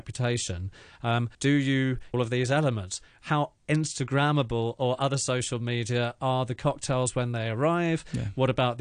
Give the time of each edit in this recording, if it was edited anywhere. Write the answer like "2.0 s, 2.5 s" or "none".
1.3 s, 2.1 s